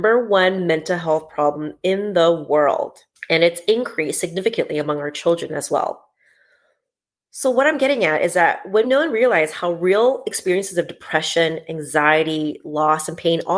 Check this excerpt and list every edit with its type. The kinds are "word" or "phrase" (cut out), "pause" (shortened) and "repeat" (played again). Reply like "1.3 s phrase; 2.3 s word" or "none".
8.8 s word